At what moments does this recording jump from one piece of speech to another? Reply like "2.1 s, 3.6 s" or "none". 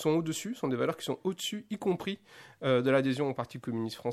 none